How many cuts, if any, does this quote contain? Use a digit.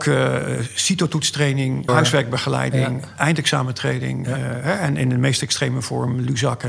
1